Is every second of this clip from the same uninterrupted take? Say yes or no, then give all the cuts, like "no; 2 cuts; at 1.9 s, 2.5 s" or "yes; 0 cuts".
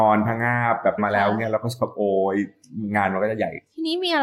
no; 1 cut; at 1.0 s